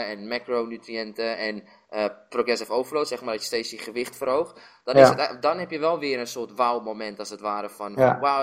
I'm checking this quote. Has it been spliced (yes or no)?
no